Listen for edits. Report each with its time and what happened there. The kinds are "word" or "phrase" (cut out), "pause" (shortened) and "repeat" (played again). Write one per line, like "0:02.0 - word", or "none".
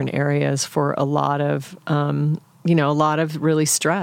none